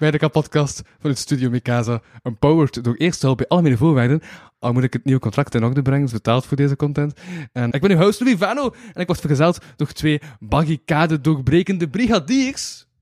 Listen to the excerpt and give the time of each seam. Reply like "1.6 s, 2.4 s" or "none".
5.5 s, 6.1 s, 7.7 s